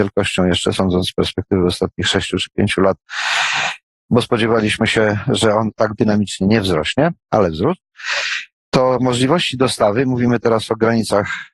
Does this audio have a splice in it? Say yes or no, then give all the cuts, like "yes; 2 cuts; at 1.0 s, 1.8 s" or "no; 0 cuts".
no; 0 cuts